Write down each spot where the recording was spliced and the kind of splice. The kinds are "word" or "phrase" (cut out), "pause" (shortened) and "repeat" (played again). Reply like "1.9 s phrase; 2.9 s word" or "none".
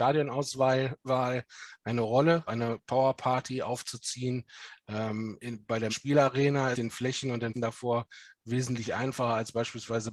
2.5 s word; 5.9 s word; 6.7 s phrase; 7.5 s word